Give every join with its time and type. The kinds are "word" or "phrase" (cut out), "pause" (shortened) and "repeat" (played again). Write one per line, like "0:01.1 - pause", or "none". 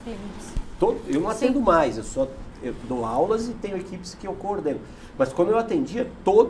none